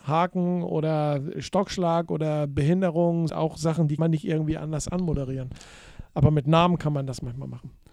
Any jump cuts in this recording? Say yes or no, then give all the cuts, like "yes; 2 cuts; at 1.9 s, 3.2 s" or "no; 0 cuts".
yes; 3 cuts; at 1.3 s, 3.3 s, 4.0 s